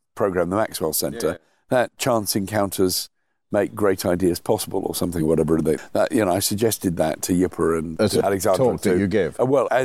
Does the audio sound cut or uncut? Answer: uncut